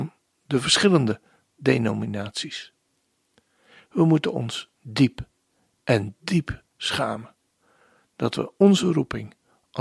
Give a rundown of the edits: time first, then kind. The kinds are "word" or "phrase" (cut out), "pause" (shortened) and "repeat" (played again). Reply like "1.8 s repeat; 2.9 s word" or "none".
none